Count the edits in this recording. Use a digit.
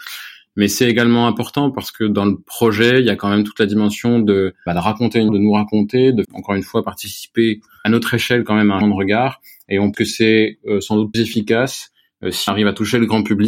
8